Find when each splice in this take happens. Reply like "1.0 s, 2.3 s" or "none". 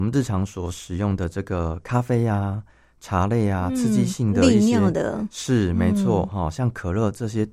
none